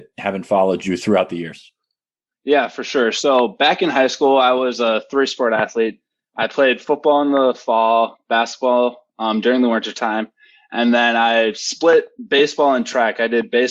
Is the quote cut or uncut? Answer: uncut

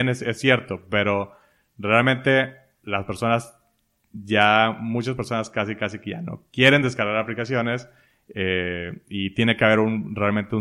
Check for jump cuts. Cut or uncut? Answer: uncut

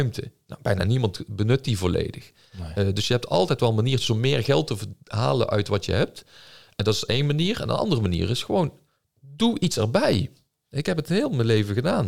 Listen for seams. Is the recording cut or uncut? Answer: uncut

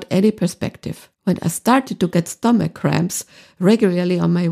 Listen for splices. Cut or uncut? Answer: cut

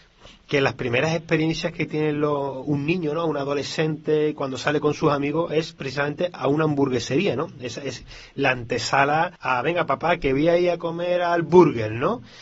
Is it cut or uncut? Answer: cut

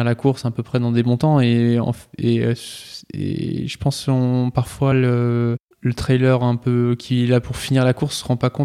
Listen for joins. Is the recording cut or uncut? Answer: uncut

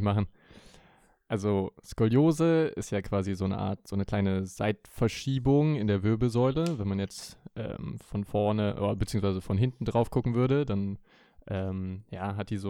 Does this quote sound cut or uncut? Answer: uncut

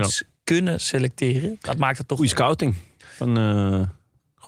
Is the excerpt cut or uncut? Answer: uncut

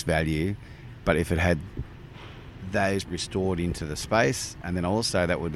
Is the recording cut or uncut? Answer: cut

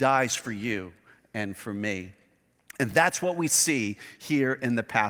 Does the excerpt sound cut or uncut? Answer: uncut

